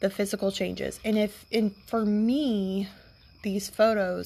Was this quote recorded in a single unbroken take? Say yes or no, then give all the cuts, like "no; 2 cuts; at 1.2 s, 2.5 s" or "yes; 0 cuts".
yes; 0 cuts